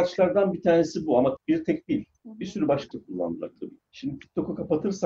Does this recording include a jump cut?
yes; 3 cuts; at 1.4 s, 1.8 s, 2.9 s

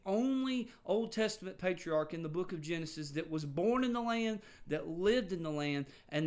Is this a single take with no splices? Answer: yes; 0 cuts

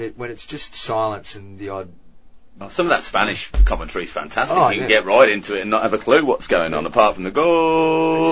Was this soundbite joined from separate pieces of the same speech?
no; 0 cuts

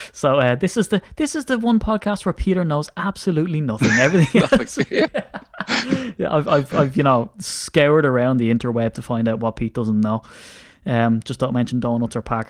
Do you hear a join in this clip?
no; 0 cuts

